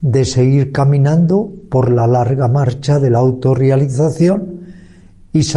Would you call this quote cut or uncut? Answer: uncut